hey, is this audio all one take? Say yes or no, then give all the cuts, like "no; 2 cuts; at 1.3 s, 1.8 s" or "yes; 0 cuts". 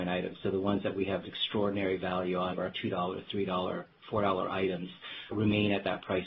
no; 3 cuts; at 1.2 s, 2.5 s, 5.3 s